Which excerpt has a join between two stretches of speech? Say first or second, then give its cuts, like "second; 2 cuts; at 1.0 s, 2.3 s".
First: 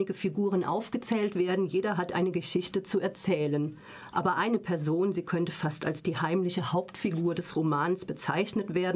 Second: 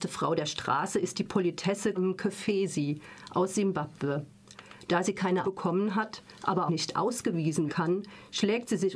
second; 4 cuts; at 2.0 s, 5.4 s, 6.7 s, 7.7 s